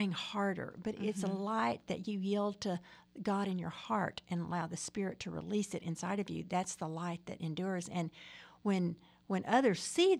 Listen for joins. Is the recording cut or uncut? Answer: uncut